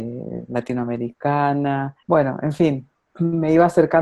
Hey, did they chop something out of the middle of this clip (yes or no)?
yes